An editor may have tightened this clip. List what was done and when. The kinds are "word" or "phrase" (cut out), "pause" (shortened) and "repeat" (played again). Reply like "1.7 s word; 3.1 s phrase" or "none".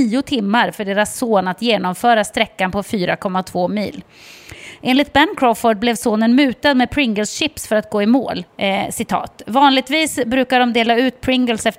8.5 s pause